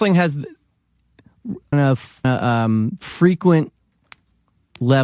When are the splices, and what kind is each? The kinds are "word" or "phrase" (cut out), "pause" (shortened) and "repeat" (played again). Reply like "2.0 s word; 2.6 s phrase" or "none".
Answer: 1.7 s word; 2.2 s word